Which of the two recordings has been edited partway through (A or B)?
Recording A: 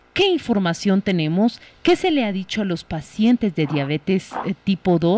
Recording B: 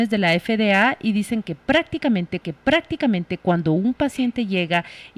B